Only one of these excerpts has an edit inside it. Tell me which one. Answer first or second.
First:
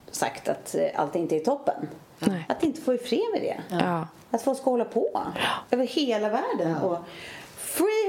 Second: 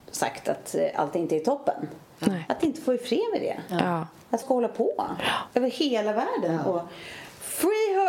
second